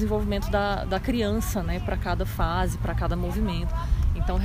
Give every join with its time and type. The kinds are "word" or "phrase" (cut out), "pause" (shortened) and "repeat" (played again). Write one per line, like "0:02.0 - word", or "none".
none